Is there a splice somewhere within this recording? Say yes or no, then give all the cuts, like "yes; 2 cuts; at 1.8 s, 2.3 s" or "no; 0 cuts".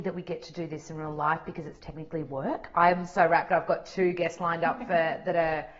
no; 0 cuts